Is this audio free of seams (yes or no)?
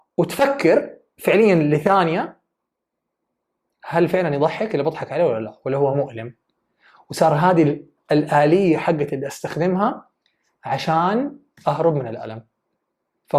yes